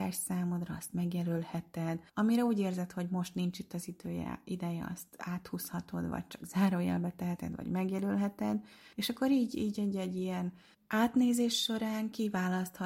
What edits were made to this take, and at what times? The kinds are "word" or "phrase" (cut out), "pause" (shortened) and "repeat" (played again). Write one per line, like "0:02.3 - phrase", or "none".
0:02.1 - pause
0:08.9 - pause
0:10.7 - pause